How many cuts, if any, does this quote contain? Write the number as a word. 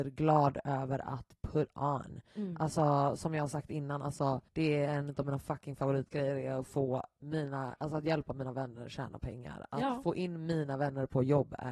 one